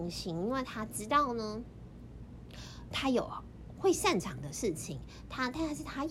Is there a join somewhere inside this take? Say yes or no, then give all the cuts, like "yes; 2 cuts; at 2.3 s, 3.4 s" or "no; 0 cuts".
yes; 1 cut; at 2.9 s